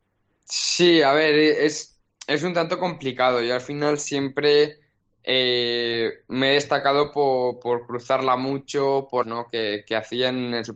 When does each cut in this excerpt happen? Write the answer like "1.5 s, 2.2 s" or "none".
9.2 s

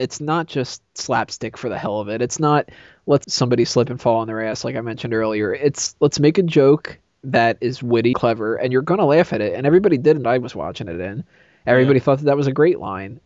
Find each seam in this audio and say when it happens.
3.2 s, 8.1 s, 10.2 s

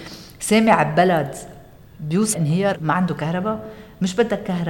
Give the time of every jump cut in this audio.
2.3 s, 2.7 s

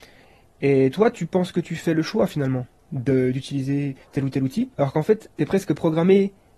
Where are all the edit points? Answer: 4.7 s, 5.3 s

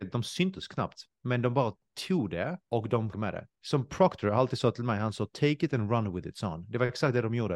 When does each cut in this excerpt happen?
2.6 s, 3.1 s

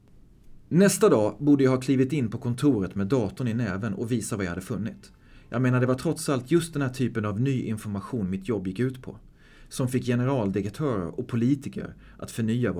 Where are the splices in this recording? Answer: none

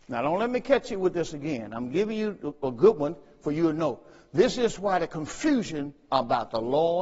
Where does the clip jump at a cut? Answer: none

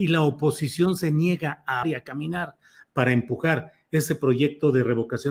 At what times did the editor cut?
1.8 s

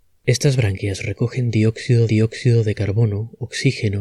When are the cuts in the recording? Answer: 2.1 s

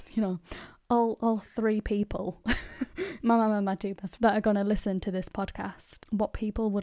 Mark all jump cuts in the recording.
4.2 s

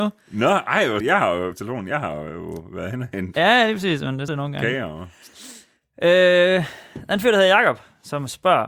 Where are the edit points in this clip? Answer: 1.0 s, 1.5 s, 4.3 s

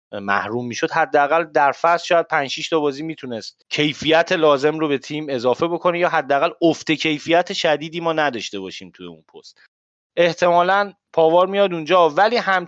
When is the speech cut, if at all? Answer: none

